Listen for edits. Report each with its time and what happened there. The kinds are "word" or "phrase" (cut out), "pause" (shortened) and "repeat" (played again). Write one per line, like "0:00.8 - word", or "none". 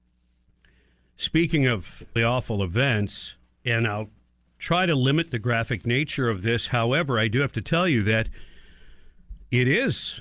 0:02.2 - word